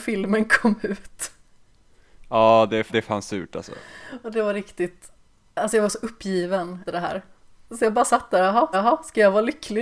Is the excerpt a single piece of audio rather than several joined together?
no; 5 cuts; at 2.9 s, 5.3 s, 6.9 s, 7.4 s, 8.7 s

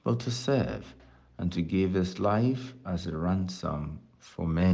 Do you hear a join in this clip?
no; 0 cuts

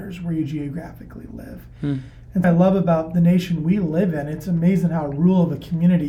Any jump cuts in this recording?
yes; 1 cut; at 2.4 s

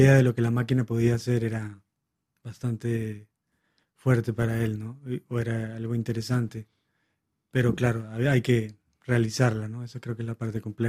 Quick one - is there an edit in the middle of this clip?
no; 0 cuts

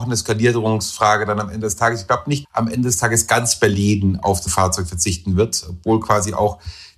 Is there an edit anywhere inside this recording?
yes; 2 cuts; at 2.4 s, 4.5 s

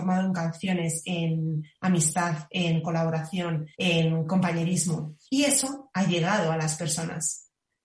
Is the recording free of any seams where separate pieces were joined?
no; 2 cuts; at 3.7 s, 5.2 s

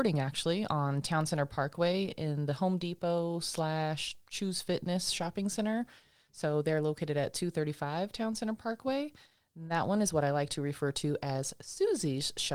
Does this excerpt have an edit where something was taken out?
no; 0 cuts

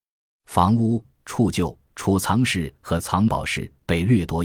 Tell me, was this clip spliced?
yes; 1 cut; at 1.9 s

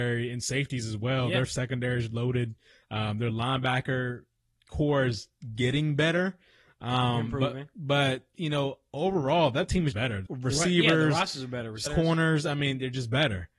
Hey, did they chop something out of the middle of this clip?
yes; 3 cuts; at 9.9 s, 10.3 s, 11.9 s

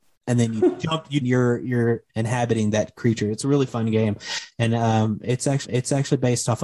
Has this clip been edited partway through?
yes; 3 cuts; at 1.2 s, 2.1 s, 5.6 s

